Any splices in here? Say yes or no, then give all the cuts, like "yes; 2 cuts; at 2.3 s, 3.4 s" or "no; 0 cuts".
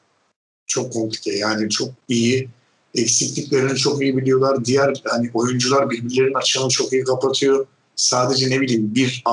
no; 0 cuts